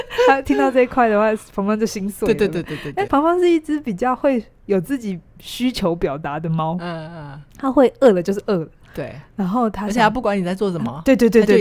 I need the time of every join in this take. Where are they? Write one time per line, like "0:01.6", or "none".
0:03.1
0:07.5